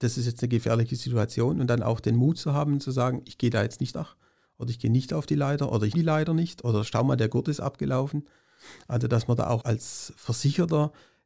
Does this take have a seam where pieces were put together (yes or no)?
yes